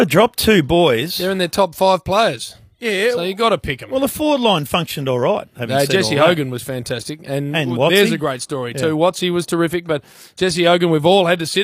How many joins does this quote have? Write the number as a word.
zero